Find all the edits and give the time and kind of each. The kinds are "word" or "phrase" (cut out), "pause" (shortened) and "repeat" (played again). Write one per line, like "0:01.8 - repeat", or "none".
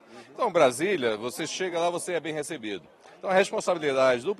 none